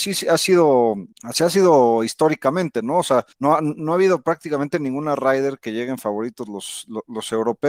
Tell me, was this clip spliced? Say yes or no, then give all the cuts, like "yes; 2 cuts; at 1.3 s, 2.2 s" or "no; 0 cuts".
yes; 2 cuts; at 1.1 s, 3.3 s